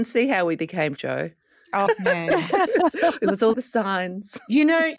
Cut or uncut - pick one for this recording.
cut